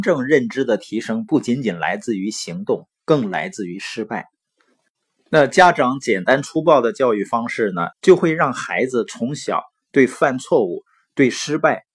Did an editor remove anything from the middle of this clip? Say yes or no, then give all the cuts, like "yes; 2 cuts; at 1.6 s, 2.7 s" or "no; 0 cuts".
yes; 1 cut; at 7.9 s